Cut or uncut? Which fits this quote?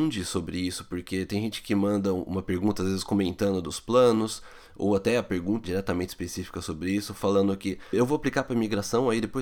cut